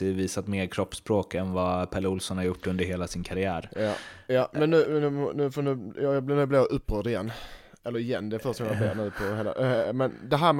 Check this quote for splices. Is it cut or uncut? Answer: uncut